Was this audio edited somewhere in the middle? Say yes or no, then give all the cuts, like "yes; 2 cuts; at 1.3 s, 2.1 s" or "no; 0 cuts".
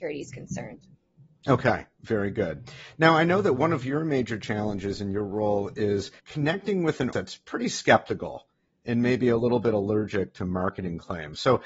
yes; 2 cuts; at 6.2 s, 7.1 s